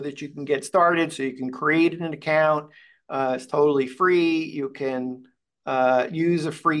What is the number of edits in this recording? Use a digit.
0